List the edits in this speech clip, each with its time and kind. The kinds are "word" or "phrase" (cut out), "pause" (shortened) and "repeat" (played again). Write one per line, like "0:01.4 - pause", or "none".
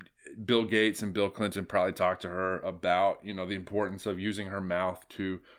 none